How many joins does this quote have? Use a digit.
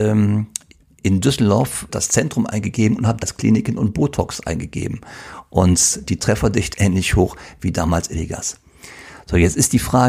4